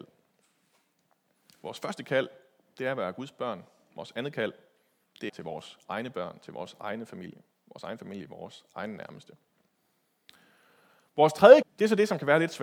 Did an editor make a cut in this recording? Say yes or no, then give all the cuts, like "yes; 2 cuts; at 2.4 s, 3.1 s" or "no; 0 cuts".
yes; 2 cuts; at 5.3 s, 11.6 s